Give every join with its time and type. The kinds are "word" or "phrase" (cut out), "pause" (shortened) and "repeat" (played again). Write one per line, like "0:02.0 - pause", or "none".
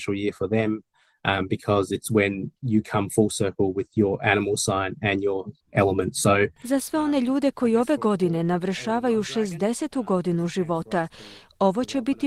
0:05.6 - pause